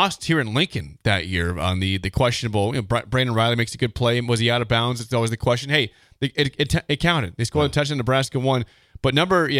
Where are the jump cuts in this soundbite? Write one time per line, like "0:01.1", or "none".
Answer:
none